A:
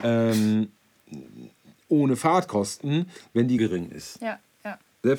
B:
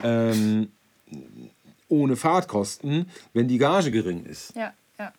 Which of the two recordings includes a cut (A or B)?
A